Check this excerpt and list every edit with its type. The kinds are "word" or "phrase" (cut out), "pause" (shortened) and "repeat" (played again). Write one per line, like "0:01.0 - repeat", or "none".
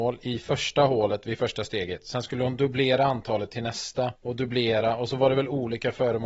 0:04.2 - pause